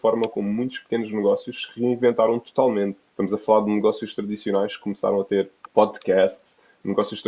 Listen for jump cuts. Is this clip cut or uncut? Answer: cut